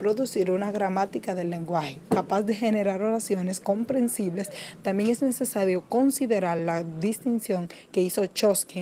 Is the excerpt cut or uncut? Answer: uncut